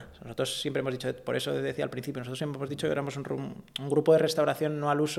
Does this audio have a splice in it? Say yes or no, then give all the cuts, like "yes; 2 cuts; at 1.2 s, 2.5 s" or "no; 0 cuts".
no; 0 cuts